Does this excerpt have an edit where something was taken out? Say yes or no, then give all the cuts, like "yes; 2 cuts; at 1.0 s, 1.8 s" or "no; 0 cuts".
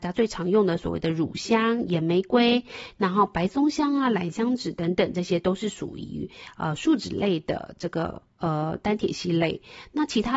yes; 1 cut; at 8.3 s